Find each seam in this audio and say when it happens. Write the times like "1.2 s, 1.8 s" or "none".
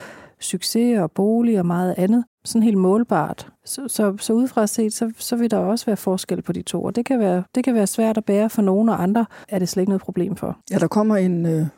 2.3 s, 3.6 s, 7.5 s, 9.4 s, 10.6 s